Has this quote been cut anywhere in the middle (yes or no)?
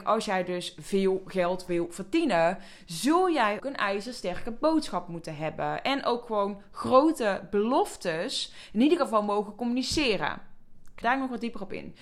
yes